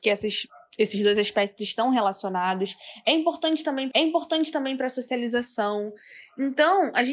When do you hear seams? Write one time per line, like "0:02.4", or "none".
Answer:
0:03.9